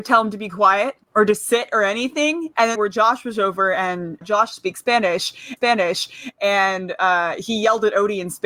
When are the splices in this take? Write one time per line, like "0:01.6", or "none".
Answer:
0:01.0
0:02.7
0:04.2
0:05.6